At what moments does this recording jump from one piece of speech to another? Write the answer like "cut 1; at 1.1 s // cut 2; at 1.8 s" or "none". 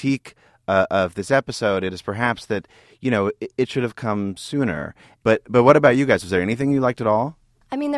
none